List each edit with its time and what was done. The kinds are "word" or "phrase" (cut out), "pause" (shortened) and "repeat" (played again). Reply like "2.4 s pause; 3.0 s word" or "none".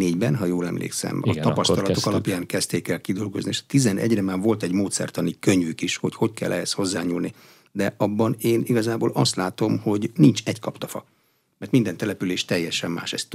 none